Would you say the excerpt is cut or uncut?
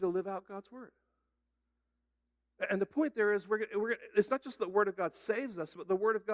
uncut